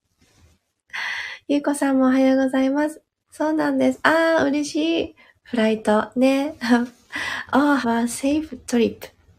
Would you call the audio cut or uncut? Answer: cut